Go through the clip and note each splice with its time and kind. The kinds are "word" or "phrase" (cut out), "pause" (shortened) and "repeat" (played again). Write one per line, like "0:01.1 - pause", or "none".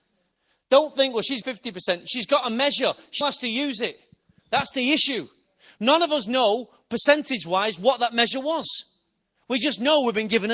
0:01.4 - word
0:03.2 - word